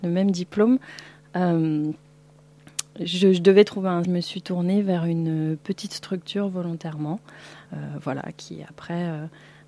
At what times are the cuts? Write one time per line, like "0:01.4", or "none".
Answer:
0:04.0
0:07.7